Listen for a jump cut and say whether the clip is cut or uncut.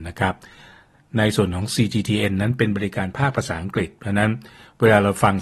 uncut